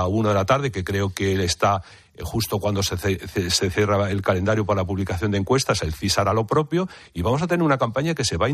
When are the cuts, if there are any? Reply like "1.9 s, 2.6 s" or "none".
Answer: none